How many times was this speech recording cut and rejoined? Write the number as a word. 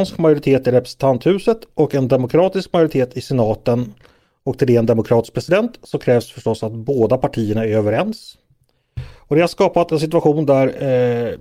zero